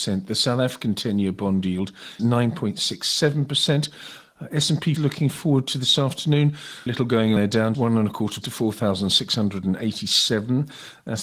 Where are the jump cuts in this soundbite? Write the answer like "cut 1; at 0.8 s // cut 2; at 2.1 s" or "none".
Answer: cut 1; at 2.2 s // cut 2; at 5.0 s // cut 3; at 6.9 s // cut 4; at 7.4 s // cut 5; at 7.7 s // cut 6; at 8.4 s